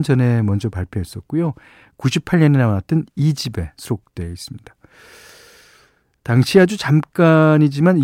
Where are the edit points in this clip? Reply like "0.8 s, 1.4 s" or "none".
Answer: none